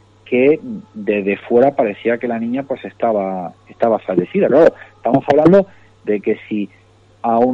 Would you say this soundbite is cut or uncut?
uncut